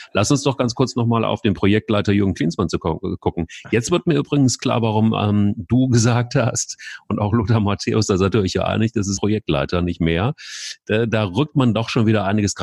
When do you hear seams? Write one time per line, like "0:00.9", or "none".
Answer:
0:09.2